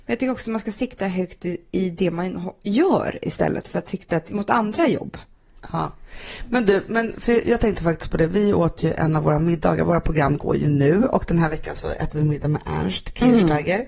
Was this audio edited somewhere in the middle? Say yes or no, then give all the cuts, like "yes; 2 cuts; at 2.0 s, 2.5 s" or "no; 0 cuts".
no; 0 cuts